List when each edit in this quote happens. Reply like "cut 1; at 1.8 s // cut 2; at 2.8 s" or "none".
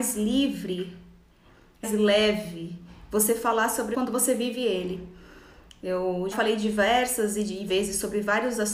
cut 1; at 1.8 s // cut 2; at 3.9 s // cut 3; at 6.3 s // cut 4; at 7.7 s